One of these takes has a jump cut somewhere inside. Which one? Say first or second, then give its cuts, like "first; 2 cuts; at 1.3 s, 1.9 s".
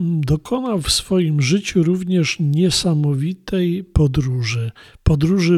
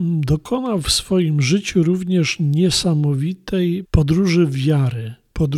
second; 1 cut; at 3.8 s